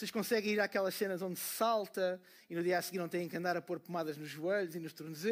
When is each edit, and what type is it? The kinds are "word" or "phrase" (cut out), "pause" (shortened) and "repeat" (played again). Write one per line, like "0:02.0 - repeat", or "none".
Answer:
none

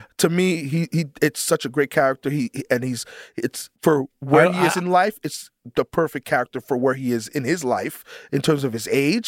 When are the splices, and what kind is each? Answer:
0:03.8 - pause

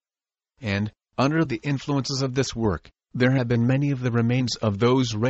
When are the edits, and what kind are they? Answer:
none

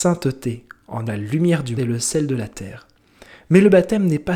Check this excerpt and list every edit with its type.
0:01.1 - word
0:01.8 - word

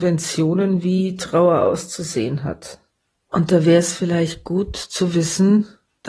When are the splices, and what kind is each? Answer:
none

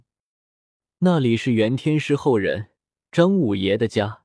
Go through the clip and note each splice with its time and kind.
none

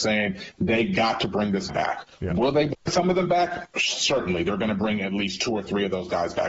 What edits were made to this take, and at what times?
0:01.7 - word

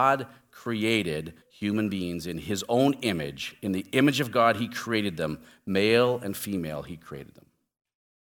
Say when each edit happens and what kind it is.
0:01.4 - pause

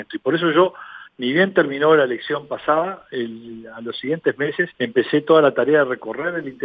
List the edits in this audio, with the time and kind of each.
0:04.7 - pause

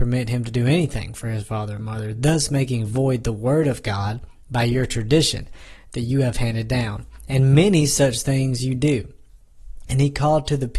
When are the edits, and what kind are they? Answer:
none

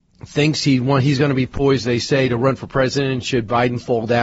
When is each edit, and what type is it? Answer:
none

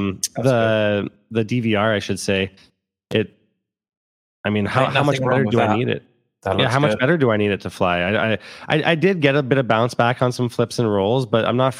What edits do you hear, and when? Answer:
none

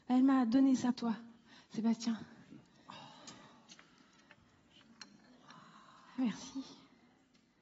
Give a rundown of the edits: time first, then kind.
0:00.9 - word

